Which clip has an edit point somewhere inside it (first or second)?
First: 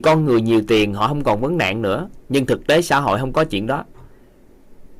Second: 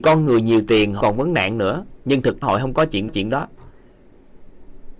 second